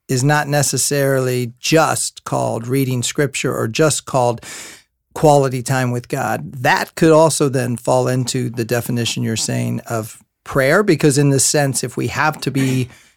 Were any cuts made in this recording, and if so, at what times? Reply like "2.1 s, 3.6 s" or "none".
none